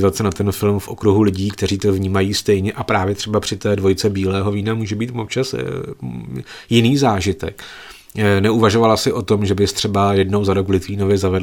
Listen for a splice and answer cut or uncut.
uncut